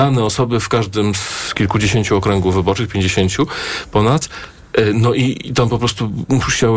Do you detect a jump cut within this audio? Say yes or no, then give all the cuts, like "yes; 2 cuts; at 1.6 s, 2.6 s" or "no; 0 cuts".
no; 0 cuts